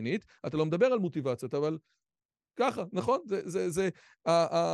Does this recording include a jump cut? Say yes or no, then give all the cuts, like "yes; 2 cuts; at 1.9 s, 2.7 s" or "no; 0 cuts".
no; 0 cuts